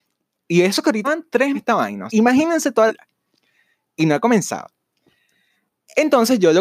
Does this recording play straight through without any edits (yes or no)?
no